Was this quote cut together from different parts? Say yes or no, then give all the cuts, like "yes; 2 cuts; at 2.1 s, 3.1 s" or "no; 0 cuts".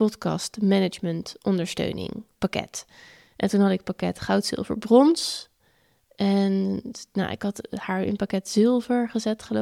no; 0 cuts